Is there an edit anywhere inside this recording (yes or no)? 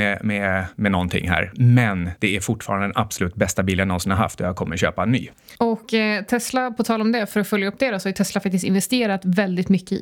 no